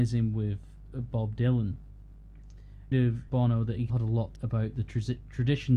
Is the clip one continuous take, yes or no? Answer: no